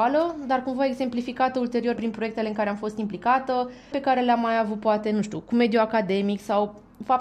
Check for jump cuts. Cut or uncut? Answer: cut